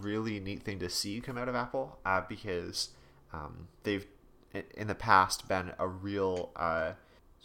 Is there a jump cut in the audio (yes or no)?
no